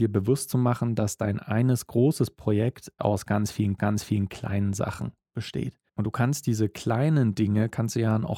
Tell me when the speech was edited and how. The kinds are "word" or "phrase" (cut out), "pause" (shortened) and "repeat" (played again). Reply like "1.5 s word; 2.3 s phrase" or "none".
3.0 s word; 3.8 s repeat; 5.9 s pause